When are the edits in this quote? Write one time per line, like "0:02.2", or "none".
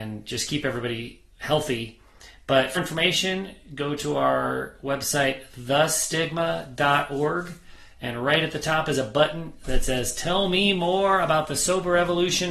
0:01.3
0:02.8